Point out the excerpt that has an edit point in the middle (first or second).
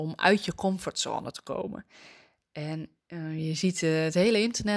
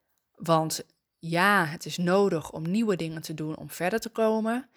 first